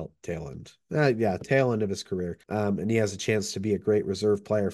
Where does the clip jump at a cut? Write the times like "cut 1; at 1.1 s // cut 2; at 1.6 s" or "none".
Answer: cut 1; at 2.4 s